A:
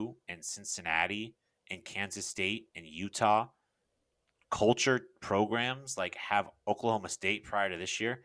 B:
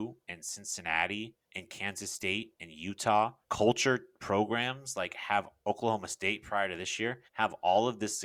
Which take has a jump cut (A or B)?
B